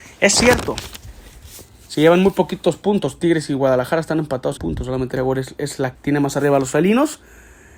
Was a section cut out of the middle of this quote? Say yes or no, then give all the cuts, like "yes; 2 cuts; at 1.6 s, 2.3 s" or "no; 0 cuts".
yes; 3 cuts; at 4.6 s, 5.2 s, 5.9 s